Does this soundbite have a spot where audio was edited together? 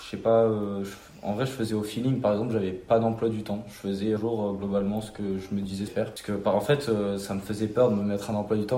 yes; 2 cuts; at 4.2 s, 5.9 s

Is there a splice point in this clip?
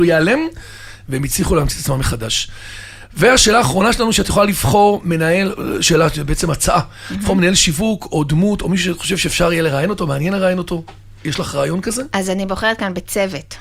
no; 0 cuts

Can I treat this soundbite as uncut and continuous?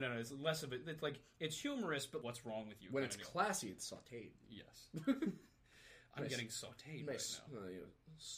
no; 1 cut; at 2.2 s

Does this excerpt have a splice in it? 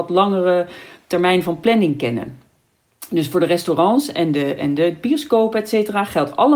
no; 0 cuts

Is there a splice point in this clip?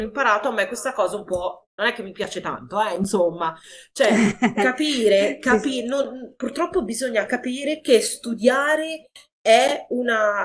yes; 1 cut; at 1.7 s

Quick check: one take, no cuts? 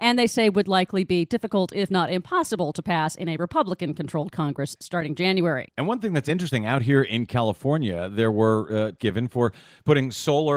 no; 1 cut; at 9.0 s

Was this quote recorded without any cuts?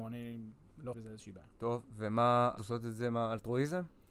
no; 2 cuts; at 0.9 s, 2.6 s

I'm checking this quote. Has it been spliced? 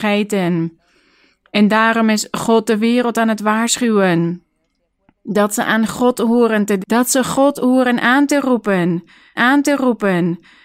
yes; 2 cuts; at 6.8 s, 9.4 s

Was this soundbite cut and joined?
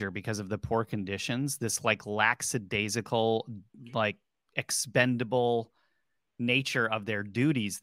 no; 0 cuts

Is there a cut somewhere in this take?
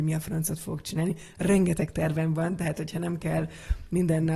no; 0 cuts

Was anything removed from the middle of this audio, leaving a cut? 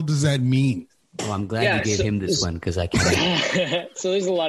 yes; 1 cut; at 1.0 s

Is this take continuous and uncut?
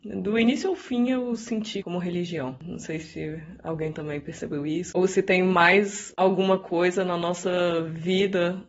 no; 1 cut; at 1.8 s

